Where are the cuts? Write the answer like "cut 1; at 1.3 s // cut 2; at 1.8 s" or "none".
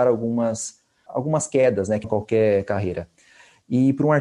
cut 1; at 1.1 s // cut 2; at 2.0 s